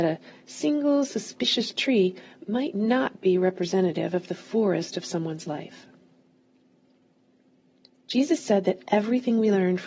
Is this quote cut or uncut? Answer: uncut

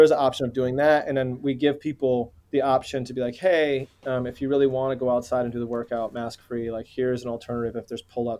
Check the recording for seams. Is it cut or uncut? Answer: cut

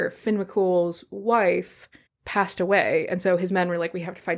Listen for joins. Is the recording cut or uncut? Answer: cut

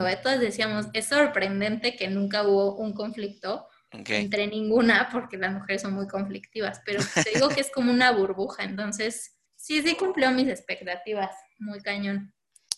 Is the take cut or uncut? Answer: cut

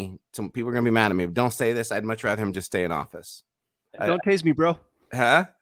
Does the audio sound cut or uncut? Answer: uncut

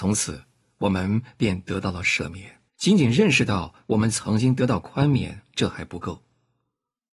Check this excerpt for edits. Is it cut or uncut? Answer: cut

